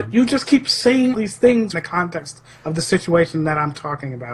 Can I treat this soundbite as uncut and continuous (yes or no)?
no